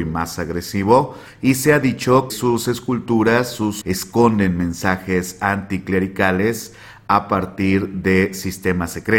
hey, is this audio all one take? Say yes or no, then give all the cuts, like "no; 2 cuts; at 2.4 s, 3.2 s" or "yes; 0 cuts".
no; 2 cuts; at 2.3 s, 3.8 s